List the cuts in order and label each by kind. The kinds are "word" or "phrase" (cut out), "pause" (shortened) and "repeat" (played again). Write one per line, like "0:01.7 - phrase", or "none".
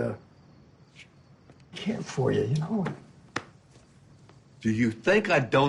0:01.7 - word